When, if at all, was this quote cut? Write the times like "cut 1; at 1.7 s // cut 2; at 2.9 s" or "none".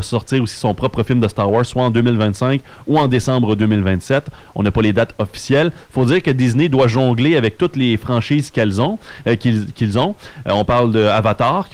none